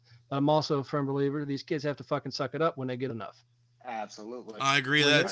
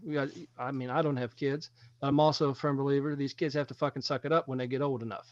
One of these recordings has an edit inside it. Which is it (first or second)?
first